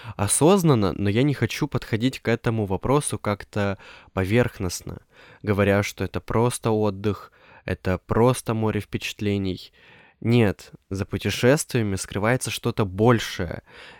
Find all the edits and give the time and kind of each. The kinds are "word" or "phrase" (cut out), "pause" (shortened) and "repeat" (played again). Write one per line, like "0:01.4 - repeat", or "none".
none